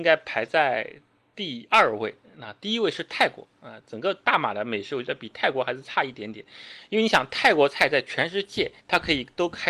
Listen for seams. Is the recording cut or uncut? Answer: cut